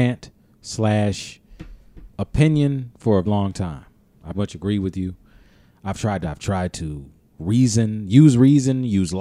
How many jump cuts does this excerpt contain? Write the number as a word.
four